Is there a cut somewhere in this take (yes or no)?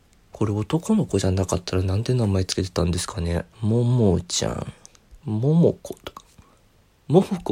yes